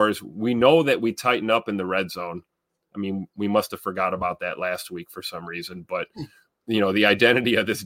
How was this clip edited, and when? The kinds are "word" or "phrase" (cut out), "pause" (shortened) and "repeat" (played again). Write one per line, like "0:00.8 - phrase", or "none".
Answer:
none

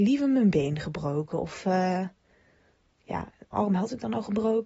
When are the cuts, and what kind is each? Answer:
0:03.5 - word

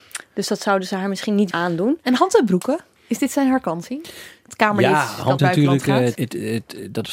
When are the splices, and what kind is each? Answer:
0:01.5 - word
0:03.0 - pause
0:05.4 - phrase
0:06.1 - word

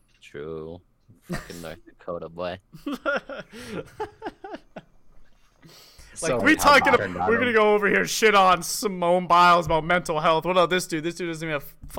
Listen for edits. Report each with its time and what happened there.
0:06.4 - word
0:07.0 - word

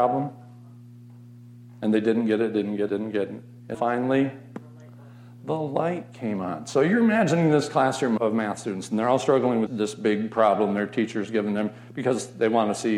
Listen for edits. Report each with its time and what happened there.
0:02.9 - word
0:03.7 - word
0:08.2 - word
0:09.7 - word

